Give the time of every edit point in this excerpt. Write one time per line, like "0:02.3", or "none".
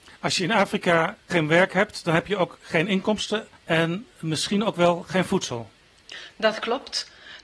0:01.3
0:02.6
0:03.6